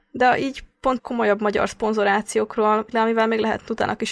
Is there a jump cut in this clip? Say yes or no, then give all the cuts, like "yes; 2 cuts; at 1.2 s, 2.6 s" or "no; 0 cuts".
yes; 2 cuts; at 1.0 s, 2.9 s